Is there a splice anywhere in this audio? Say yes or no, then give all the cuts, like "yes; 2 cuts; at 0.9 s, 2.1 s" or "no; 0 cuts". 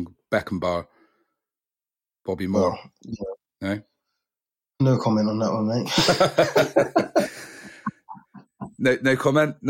no; 0 cuts